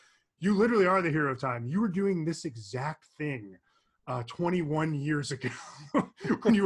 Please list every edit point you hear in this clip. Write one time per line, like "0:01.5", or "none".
none